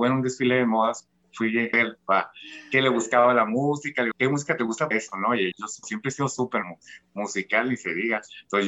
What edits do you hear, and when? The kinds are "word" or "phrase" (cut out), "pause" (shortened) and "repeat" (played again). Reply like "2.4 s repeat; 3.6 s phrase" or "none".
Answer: 1.7 s word; 4.1 s word; 4.9 s word; 5.5 s word; 5.8 s word; 6.6 s word